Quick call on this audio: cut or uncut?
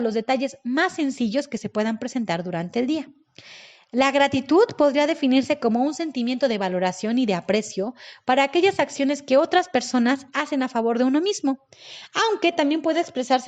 uncut